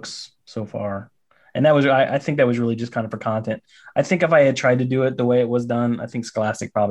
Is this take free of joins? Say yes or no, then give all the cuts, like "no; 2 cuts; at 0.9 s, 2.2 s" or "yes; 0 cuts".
yes; 0 cuts